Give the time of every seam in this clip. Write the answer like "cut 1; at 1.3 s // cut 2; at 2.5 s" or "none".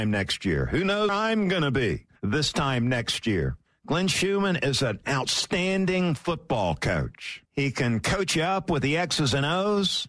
cut 1; at 1.1 s // cut 2; at 2.2 s // cut 3; at 3.7 s // cut 4; at 7.5 s